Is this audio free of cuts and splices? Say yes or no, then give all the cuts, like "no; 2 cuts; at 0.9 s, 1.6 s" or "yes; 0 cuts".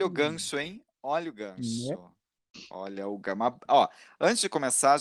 yes; 0 cuts